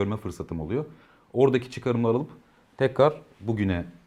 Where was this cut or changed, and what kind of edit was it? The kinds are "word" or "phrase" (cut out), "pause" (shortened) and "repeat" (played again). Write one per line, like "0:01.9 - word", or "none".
none

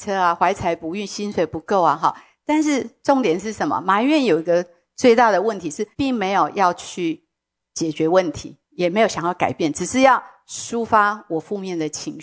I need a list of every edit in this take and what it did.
0:05.9 - pause

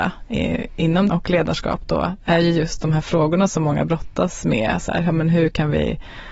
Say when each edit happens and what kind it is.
0:01.1 - word

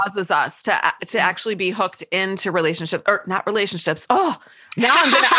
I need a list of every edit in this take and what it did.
none

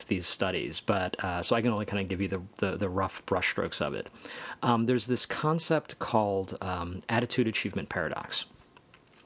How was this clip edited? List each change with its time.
none

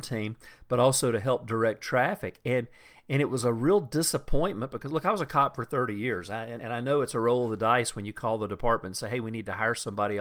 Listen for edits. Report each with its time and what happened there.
0:06.6 - word

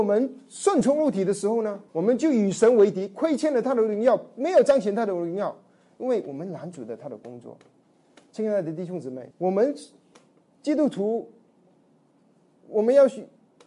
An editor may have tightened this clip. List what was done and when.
0:01.9 - pause
0:09.3 - pause

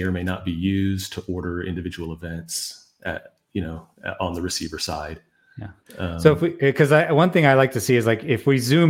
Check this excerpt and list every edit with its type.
0:05.8 - pause

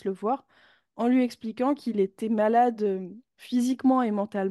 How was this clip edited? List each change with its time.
none

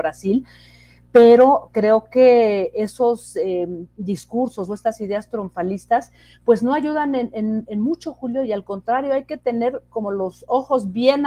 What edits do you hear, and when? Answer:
none

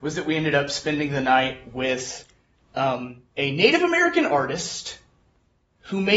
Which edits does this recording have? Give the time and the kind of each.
0:03.3 - pause

